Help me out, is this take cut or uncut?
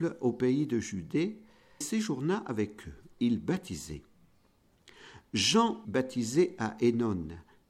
cut